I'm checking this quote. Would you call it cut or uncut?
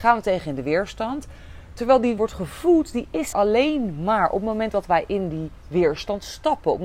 cut